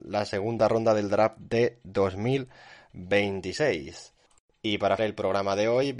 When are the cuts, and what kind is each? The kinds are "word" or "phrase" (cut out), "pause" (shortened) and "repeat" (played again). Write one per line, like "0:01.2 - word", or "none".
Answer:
0:05.0 - word